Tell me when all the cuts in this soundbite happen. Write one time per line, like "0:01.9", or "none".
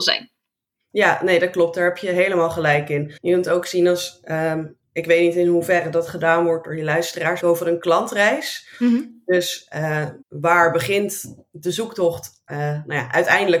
0:03.2
0:07.4
0:10.2
0:12.5